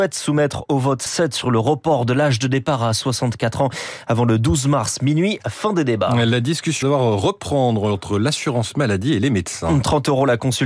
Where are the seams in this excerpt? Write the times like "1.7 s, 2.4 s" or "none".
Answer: 1.1 s, 6.8 s